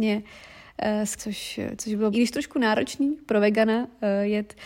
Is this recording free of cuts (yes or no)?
no